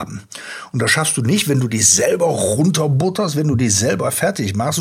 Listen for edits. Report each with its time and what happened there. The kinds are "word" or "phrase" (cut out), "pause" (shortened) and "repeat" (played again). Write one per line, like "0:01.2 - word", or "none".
none